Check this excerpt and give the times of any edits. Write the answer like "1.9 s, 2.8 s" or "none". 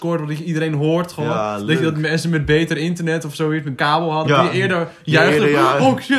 3.7 s